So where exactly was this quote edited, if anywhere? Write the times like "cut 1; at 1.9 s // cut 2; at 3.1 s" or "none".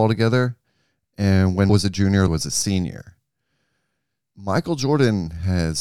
cut 1; at 1.7 s // cut 2; at 2.3 s